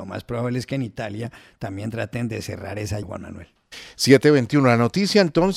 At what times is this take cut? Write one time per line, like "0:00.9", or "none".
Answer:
0:03.0